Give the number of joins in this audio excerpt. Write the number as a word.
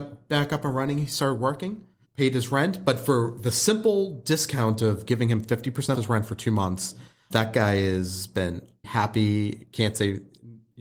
four